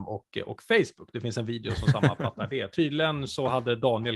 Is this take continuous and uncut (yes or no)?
yes